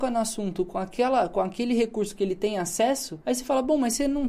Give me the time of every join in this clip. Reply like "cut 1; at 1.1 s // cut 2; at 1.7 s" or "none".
cut 1; at 3.2 s